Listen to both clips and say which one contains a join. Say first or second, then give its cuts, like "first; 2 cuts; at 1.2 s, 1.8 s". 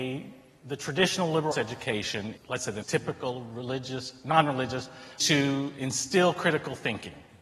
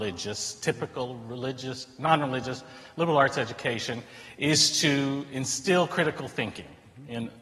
first; 4 cuts; at 1.5 s, 2.4 s, 2.8 s, 5.2 s